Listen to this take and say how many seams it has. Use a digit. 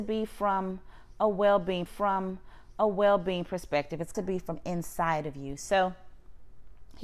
2